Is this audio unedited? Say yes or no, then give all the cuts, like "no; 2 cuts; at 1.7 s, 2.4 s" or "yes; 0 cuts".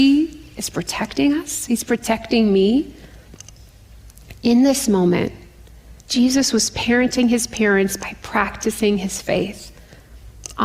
no; 1 cut; at 6.0 s